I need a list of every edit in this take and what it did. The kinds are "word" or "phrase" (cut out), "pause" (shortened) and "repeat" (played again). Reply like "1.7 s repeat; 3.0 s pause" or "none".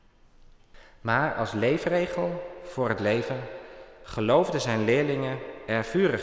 3.0 s word